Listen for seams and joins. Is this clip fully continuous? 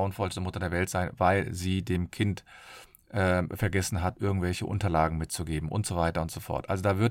yes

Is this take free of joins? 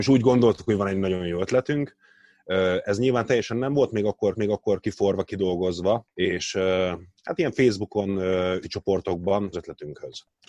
no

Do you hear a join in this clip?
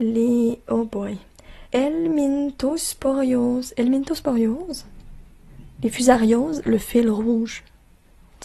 yes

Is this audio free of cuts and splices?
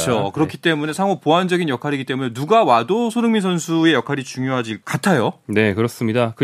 no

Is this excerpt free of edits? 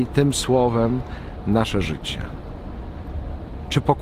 yes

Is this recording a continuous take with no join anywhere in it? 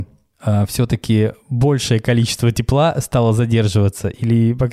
yes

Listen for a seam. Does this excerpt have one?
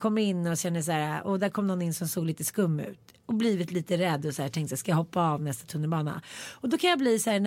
no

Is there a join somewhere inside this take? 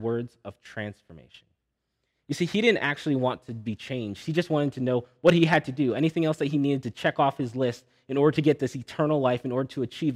no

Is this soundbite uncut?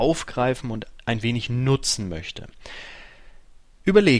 yes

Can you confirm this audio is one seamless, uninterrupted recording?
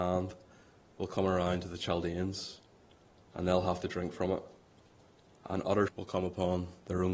no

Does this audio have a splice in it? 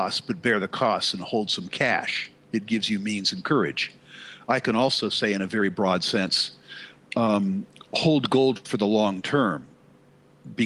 no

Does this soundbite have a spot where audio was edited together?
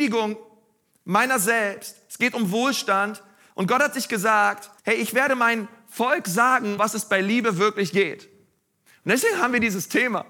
yes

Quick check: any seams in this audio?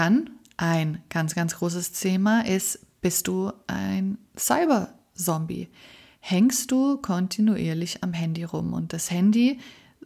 no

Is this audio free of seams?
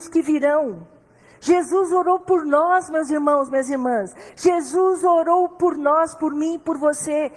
yes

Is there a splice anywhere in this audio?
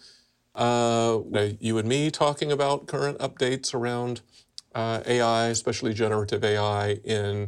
yes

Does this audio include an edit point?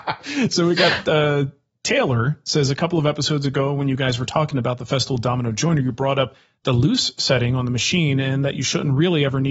no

